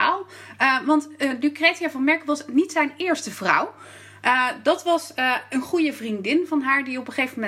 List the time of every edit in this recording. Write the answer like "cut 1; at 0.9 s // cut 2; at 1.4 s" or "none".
none